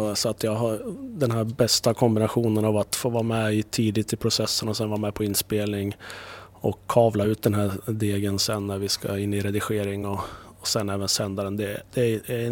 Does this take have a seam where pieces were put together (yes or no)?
no